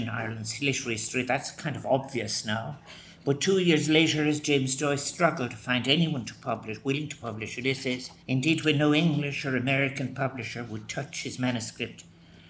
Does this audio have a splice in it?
yes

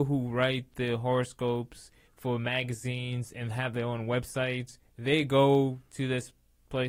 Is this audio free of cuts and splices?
no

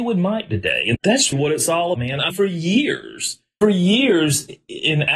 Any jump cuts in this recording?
yes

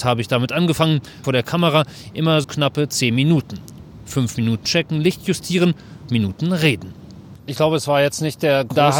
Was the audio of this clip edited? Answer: yes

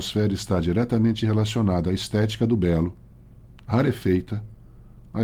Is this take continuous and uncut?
yes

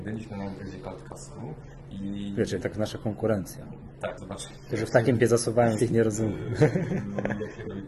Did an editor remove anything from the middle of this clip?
yes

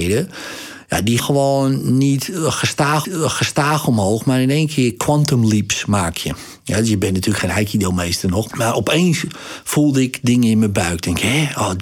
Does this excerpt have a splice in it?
yes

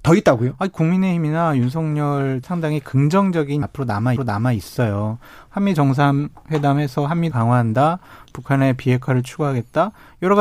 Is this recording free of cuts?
no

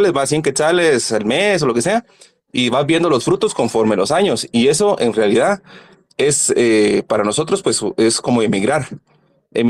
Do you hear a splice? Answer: no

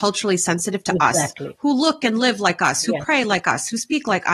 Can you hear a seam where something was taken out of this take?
no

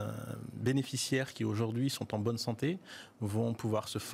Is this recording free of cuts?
yes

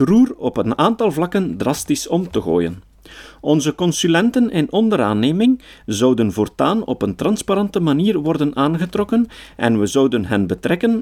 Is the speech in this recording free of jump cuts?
yes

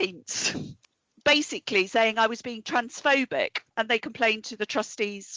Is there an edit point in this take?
yes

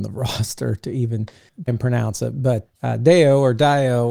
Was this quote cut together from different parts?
yes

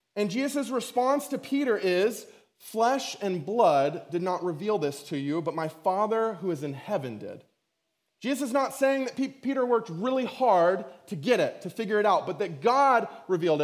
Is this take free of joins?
yes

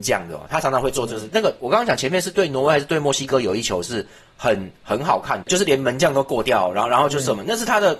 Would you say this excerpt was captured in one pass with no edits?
no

